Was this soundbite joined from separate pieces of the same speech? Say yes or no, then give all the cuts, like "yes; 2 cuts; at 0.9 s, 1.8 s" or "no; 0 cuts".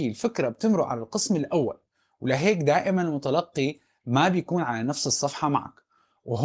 no; 0 cuts